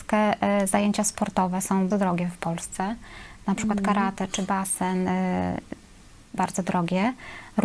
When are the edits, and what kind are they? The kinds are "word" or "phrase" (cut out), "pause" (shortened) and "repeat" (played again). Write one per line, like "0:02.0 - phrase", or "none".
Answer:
0:01.9 - word
0:06.4 - word

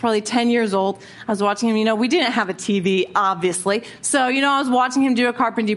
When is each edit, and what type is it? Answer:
none

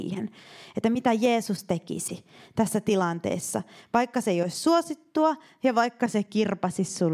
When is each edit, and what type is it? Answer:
none

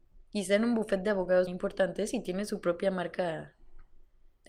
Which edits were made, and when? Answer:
0:01.5 - word

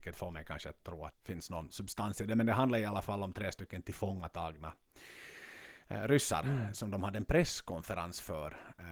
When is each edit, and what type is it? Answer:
0:01.1 - word

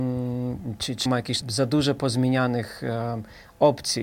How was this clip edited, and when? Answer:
0:01.1 - word
0:01.4 - word

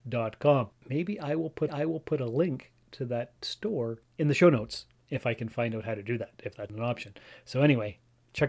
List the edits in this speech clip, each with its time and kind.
0:01.7 - repeat
0:06.7 - word

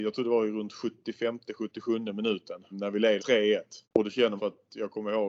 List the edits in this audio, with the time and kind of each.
0:02.7 - word
0:03.2 - word
0:03.8 - pause
0:04.4 - phrase

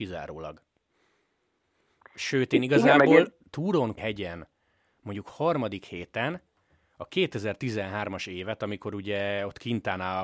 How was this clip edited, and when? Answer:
0:03.4 - word
0:04.0 - word

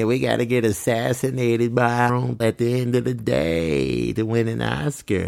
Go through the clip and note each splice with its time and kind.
0:02.1 - word
0:02.4 - word

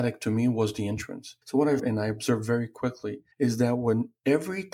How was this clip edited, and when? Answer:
0:01.4 - pause
0:01.8 - phrase
0:03.3 - pause

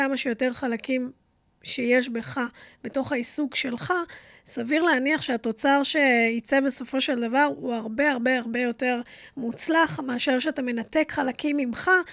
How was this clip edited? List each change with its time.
none

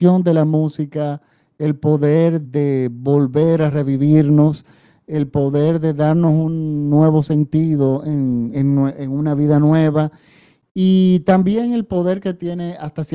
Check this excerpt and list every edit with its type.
0:02.4 - word
0:08.5 - word

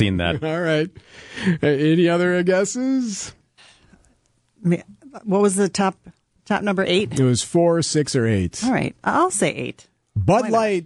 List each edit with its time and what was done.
none

